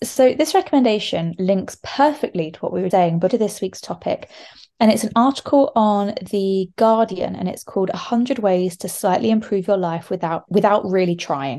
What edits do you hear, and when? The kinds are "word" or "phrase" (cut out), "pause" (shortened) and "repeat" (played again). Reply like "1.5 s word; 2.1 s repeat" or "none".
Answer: 2.9 s word; 3.3 s word; 10.5 s word